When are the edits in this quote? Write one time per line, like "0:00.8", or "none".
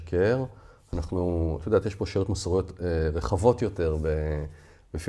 none